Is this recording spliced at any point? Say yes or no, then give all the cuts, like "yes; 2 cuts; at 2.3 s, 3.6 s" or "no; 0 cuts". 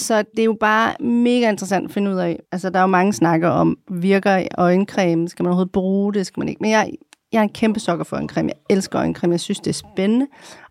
yes; 1 cut; at 2.4 s